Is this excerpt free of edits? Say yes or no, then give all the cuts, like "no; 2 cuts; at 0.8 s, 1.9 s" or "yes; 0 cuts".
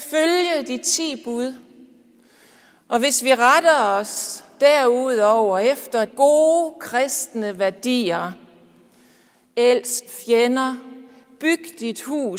no; 2 cuts; at 6.1 s, 10.1 s